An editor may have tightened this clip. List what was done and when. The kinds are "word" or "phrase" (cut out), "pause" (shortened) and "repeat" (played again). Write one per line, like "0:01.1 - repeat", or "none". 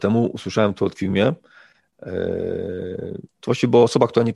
0:01.0 - word
0:03.3 - pause